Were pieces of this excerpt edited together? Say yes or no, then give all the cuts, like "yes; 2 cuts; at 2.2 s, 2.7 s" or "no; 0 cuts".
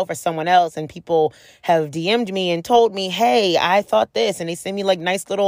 no; 0 cuts